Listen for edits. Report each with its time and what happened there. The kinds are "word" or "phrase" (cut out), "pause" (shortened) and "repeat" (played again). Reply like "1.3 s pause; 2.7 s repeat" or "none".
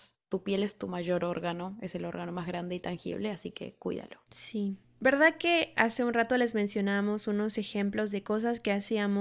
4.3 s pause